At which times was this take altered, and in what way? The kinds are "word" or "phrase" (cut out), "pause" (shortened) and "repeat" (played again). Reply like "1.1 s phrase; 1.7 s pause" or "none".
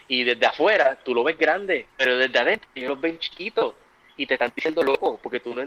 1.9 s pause